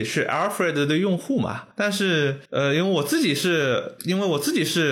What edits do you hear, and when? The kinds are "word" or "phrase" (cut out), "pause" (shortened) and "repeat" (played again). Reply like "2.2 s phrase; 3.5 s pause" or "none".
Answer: 1.7 s pause; 2.4 s pause; 4.0 s word